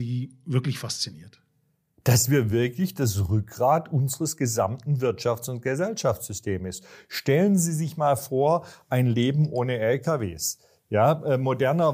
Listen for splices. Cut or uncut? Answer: uncut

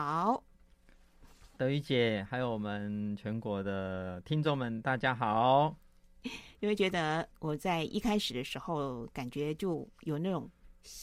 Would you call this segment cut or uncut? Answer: cut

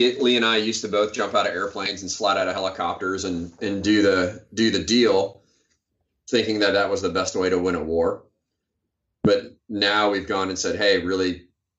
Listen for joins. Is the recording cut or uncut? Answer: uncut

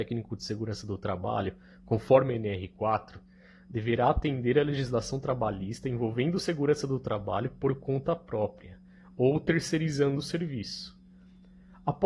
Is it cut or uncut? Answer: uncut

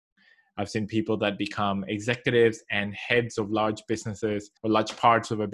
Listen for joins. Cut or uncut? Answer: cut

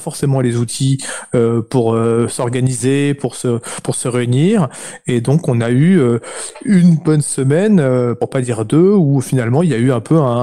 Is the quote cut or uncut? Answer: uncut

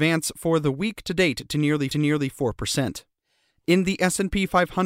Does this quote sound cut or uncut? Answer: cut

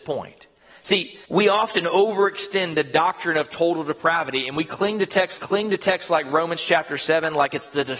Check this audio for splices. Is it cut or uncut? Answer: cut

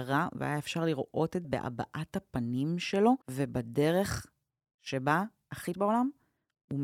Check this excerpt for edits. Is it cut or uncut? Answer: cut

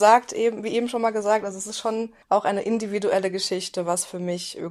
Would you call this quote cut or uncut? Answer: cut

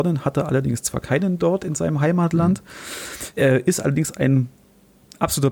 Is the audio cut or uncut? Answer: uncut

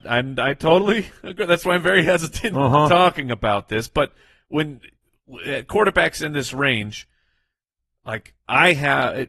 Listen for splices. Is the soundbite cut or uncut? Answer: uncut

